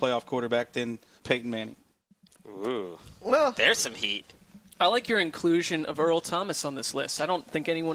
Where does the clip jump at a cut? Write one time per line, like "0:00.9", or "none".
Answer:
none